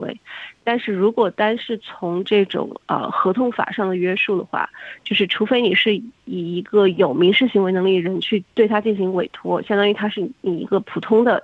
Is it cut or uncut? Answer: cut